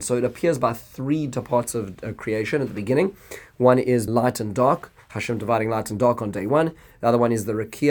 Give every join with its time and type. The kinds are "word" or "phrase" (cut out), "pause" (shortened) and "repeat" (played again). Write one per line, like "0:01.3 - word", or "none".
0:04.1 - word